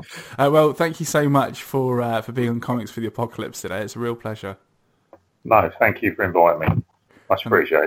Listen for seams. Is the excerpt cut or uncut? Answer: uncut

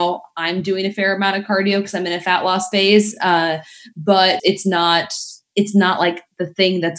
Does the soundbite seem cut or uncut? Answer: cut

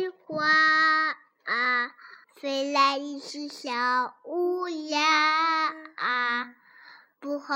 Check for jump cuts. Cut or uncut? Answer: cut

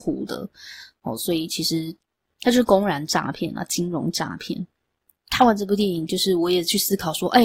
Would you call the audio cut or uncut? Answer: uncut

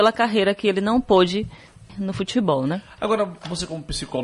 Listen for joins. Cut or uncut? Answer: cut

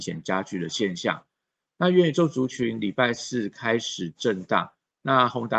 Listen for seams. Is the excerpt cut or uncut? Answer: uncut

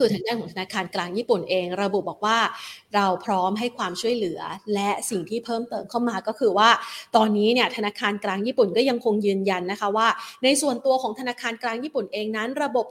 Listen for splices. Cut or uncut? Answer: uncut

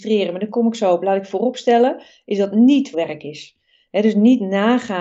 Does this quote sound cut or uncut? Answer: cut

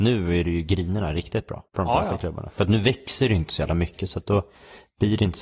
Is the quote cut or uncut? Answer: cut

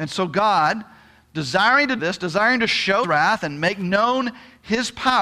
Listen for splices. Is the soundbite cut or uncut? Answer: cut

